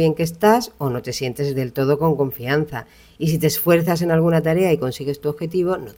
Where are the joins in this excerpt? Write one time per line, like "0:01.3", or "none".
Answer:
none